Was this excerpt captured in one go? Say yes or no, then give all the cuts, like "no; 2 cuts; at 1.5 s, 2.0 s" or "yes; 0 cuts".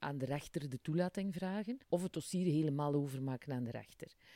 no; 1 cut; at 1.8 s